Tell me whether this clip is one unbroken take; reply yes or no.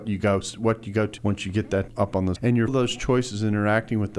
no